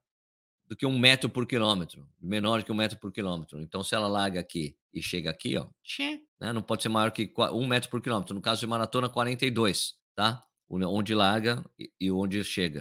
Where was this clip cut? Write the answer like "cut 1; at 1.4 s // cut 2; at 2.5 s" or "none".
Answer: cut 1; at 4.8 s // cut 2; at 6.3 s // cut 3; at 10.0 s